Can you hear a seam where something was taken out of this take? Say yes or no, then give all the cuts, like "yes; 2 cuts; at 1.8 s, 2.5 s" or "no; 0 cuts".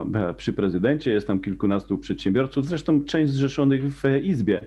no; 0 cuts